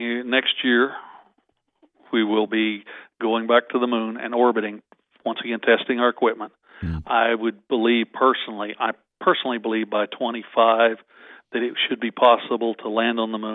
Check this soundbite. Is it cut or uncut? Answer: uncut